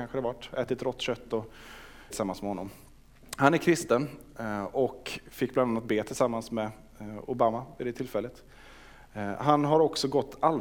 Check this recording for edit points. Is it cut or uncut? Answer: cut